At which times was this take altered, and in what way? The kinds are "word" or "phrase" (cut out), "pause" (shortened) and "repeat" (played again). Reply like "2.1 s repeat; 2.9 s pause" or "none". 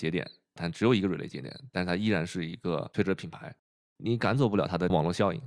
none